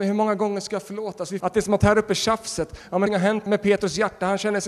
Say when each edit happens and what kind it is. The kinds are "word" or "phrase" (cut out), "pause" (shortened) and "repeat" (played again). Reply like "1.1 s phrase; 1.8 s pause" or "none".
1.4 s word; 1.8 s word; 3.1 s word; 3.5 s word